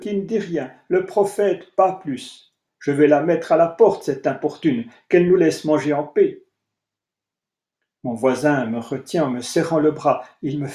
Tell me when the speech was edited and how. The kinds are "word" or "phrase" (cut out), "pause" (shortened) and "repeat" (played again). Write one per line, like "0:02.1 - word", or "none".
none